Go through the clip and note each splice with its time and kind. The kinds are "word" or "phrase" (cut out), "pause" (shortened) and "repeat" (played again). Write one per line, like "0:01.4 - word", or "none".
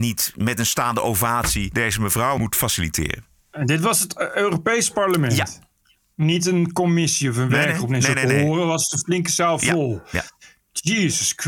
none